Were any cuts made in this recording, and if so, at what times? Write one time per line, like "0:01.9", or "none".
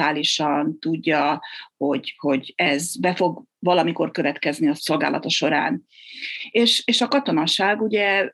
none